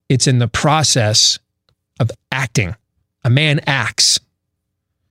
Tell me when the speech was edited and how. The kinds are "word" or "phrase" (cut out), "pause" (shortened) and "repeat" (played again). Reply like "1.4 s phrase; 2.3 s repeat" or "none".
none